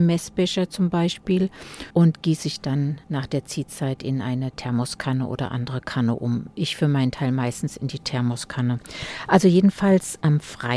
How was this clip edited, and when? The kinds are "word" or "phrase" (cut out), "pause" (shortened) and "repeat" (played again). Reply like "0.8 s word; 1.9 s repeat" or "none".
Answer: 1.9 s pause; 3.0 s pause